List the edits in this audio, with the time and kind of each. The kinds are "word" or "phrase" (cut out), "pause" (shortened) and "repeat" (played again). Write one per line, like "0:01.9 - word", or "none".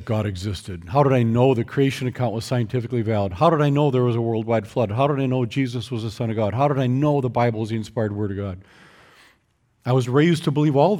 none